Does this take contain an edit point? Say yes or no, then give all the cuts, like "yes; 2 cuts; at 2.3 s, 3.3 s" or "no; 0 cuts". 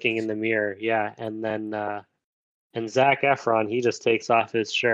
no; 0 cuts